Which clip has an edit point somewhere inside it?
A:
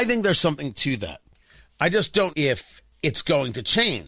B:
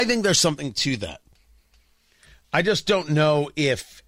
A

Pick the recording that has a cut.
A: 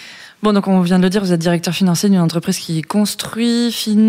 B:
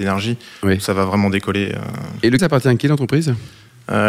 B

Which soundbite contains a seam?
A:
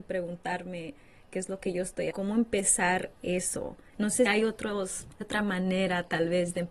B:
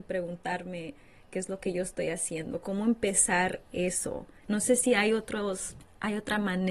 A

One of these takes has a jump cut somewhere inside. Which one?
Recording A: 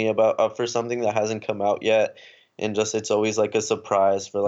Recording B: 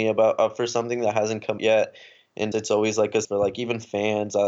B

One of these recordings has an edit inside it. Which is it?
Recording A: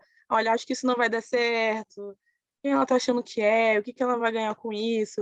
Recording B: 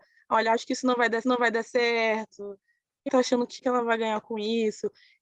B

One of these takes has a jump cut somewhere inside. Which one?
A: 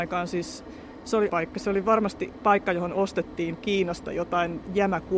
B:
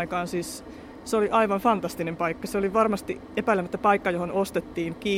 A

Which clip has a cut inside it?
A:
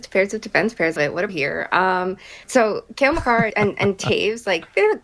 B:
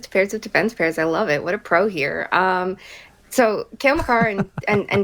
A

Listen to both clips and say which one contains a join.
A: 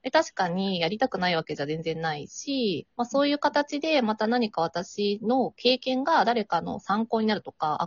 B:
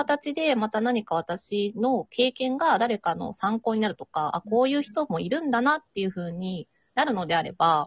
A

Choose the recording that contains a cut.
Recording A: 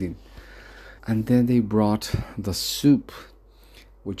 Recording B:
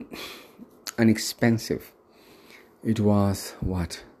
A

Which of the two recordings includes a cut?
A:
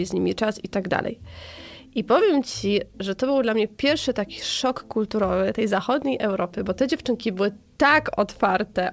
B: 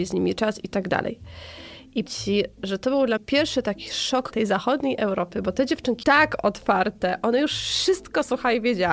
B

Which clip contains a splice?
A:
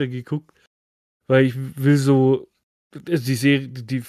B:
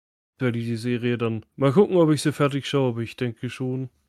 B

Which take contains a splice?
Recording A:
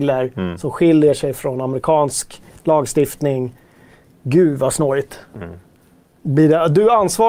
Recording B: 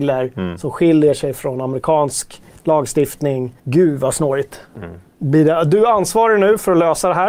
B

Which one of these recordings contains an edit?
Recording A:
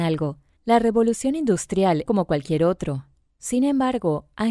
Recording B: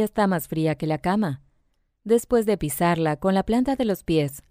A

